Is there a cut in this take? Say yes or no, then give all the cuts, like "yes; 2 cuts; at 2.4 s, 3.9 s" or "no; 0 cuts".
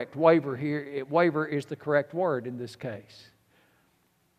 no; 0 cuts